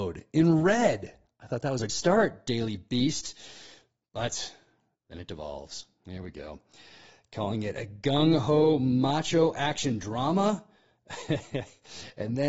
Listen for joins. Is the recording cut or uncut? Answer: cut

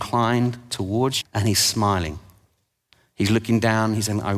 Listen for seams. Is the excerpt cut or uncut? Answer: cut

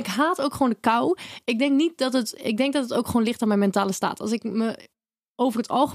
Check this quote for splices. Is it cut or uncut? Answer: uncut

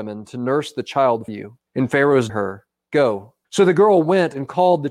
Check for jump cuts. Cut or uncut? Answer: cut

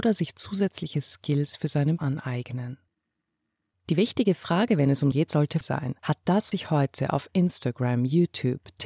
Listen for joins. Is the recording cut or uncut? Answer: cut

